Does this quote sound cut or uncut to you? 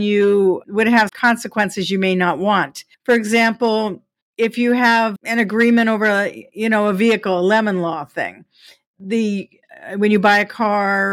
cut